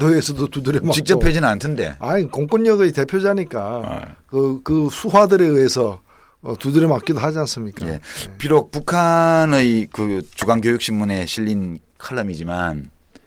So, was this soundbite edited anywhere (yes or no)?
no